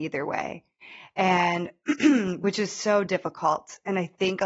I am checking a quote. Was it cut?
no; 0 cuts

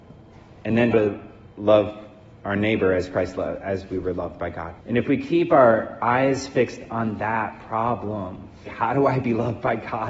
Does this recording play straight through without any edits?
no; 4 cuts; at 0.9 s, 1.5 s, 4.8 s, 8.7 s

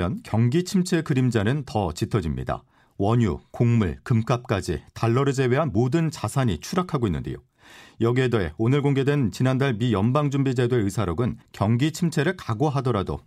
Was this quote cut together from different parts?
no; 0 cuts

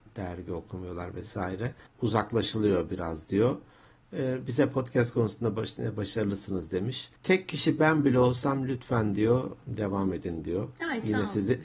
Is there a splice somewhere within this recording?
yes; 1 cut; at 7.2 s

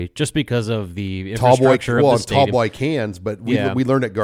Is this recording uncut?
yes; 0 cuts

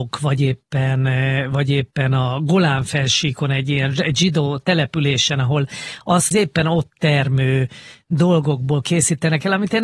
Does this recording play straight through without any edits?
no; 1 cut; at 6.3 s

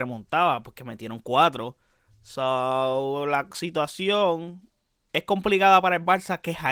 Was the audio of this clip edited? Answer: no; 0 cuts

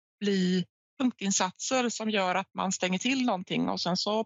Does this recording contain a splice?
no; 0 cuts

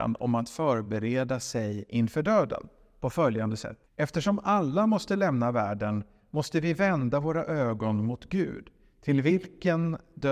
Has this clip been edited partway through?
yes; 1 cut; at 3.9 s

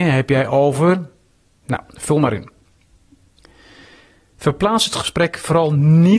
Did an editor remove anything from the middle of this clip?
no; 0 cuts

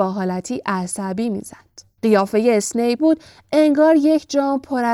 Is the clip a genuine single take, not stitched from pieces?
no; 2 cuts; at 2.0 s, 3.0 s

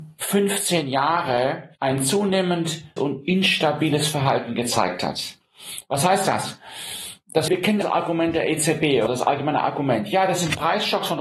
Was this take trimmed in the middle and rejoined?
yes; 5 cuts; at 1.7 s, 3.0 s, 7.5 s, 7.8 s, 9.1 s

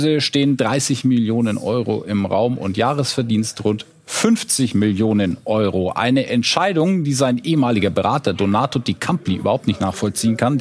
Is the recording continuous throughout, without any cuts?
yes; 0 cuts

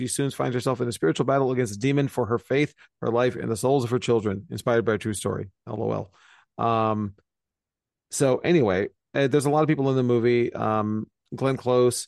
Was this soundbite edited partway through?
no; 0 cuts

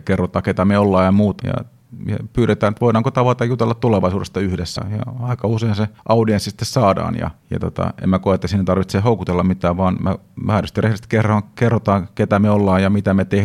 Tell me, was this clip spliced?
yes; 4 cuts; at 1.4 s, 4.8 s, 6.0 s, 7.4 s

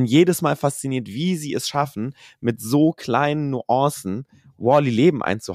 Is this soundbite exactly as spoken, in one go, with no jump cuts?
yes; 0 cuts

